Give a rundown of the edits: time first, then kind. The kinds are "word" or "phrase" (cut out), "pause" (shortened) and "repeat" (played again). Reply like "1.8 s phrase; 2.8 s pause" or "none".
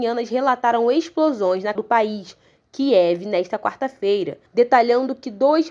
1.8 s word; 4.5 s pause